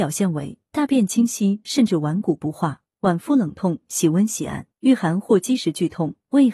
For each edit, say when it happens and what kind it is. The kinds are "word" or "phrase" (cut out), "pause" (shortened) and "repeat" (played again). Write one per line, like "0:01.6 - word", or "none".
0:04.7 - pause